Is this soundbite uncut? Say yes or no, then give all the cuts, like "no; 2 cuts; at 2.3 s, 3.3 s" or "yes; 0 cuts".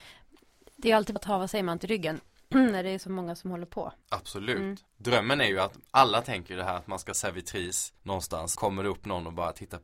no; 7 cuts; at 1.2 s, 1.8 s, 4.0 s, 4.9 s, 7.1 s, 8.0 s, 8.6 s